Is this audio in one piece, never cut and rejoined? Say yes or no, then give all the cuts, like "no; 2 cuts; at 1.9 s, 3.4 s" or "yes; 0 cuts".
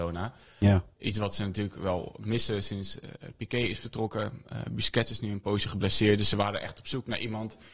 yes; 0 cuts